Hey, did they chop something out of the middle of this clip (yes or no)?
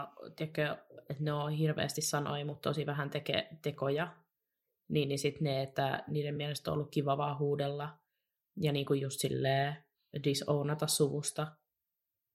no